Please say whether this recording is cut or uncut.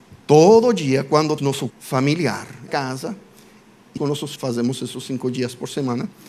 cut